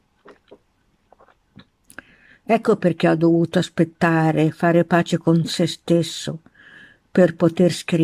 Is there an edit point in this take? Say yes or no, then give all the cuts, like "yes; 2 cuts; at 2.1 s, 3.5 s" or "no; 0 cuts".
no; 0 cuts